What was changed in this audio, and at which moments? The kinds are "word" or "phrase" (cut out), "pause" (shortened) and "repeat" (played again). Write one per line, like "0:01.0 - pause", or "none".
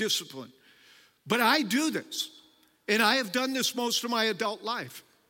none